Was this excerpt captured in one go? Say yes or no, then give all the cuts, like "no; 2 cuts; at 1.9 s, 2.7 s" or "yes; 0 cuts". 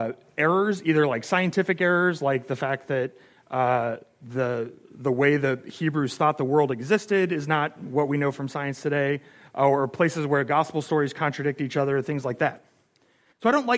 yes; 0 cuts